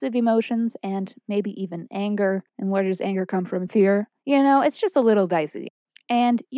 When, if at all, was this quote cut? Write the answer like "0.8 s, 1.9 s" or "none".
2.5 s, 4.2 s